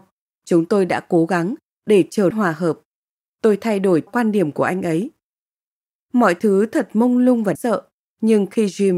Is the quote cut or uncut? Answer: cut